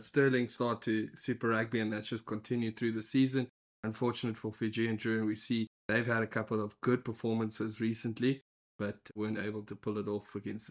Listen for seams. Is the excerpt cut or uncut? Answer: cut